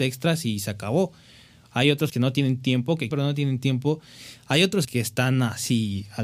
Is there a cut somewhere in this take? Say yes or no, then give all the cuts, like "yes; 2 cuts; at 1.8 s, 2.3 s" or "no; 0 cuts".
yes; 3 cuts; at 2.1 s, 3.1 s, 4.8 s